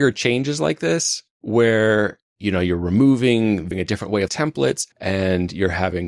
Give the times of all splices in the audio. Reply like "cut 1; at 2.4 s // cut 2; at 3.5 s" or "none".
cut 1; at 1.3 s // cut 2; at 3.7 s // cut 3; at 4.3 s // cut 4; at 4.9 s